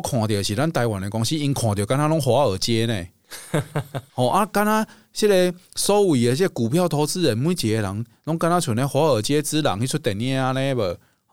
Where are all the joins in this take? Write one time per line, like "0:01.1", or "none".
none